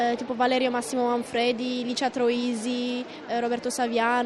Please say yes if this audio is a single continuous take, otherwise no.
yes